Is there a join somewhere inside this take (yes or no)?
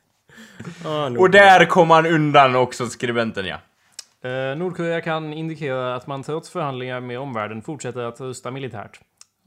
no